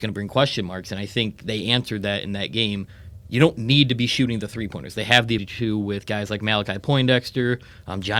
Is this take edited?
yes; 1 cut; at 5.4 s

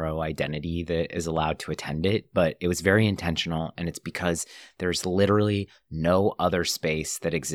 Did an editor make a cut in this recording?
no; 0 cuts

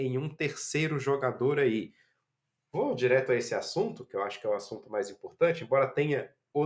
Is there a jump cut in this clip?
no; 0 cuts

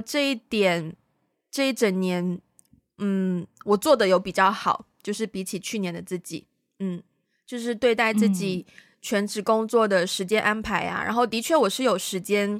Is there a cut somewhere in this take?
no; 0 cuts

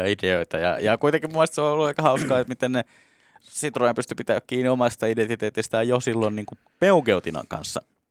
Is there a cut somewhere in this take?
no; 0 cuts

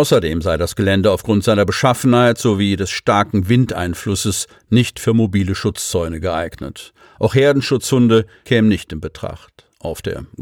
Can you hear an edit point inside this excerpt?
no; 0 cuts

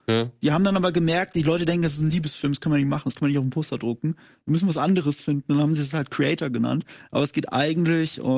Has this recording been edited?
no; 0 cuts

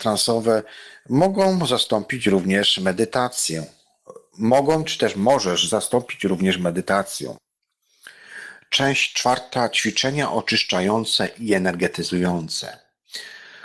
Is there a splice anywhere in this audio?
no; 0 cuts

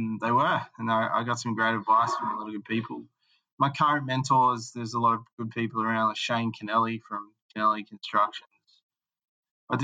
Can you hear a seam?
no; 0 cuts

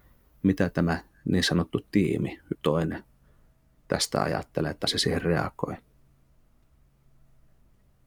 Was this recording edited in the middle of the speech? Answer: yes; 2 cuts; at 2.5 s, 4.9 s

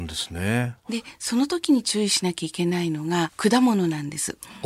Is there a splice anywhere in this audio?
yes; 1 cut; at 3.3 s

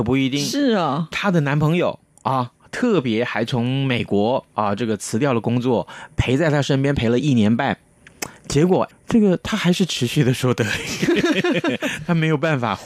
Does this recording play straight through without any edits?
no; 2 cuts; at 1.1 s, 8.9 s

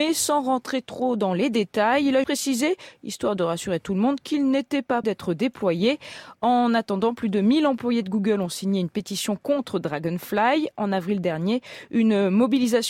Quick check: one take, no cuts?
no; 2 cuts; at 2.2 s, 5.0 s

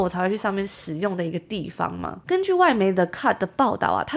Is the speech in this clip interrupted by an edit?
no; 0 cuts

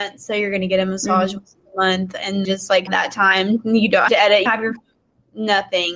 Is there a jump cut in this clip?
yes; 5 cuts; at 2.4 s, 2.9 s, 4.1 s, 4.5 s, 4.8 s

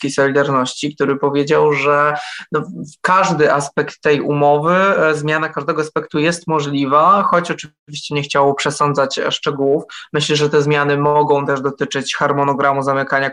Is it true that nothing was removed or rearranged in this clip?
yes; 0 cuts

